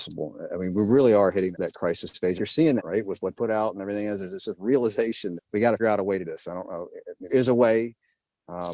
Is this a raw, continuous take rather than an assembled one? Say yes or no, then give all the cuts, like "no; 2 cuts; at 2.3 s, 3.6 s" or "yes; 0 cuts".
no; 8 cuts; at 1.5 s, 2.4 s, 2.8 s, 3.4 s, 5.4 s, 5.8 s, 6.2 s, 7.3 s